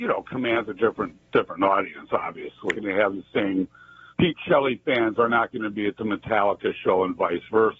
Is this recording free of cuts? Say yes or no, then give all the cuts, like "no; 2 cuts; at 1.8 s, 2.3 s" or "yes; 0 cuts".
no; 3 cuts; at 1.3 s, 2.7 s, 4.1 s